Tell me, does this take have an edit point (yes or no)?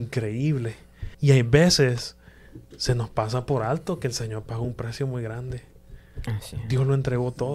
yes